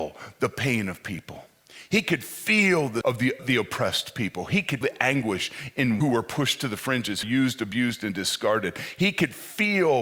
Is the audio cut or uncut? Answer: cut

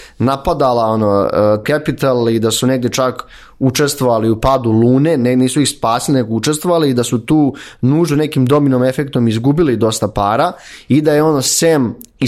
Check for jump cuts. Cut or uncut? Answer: cut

